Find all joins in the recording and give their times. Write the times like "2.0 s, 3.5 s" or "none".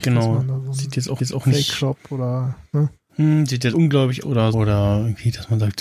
1.2 s, 3.7 s, 4.2 s, 4.5 s